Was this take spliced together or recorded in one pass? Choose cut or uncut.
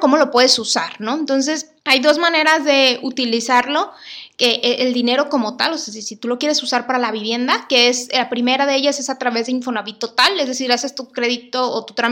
cut